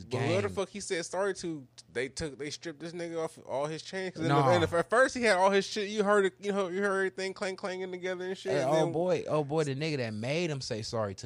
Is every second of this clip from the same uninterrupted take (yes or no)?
no